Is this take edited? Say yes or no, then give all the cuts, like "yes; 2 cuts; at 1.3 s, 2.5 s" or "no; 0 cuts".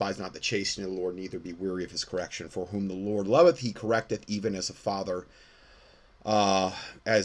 no; 0 cuts